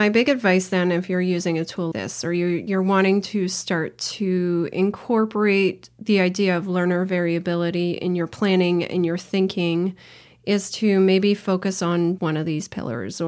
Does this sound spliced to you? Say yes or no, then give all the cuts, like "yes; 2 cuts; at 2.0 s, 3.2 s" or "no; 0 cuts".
yes; 2 cuts; at 1.9 s, 12.2 s